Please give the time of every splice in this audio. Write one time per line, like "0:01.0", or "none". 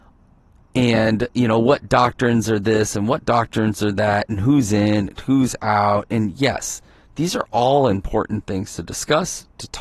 none